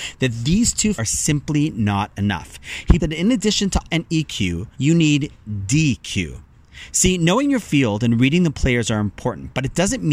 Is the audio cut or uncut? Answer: cut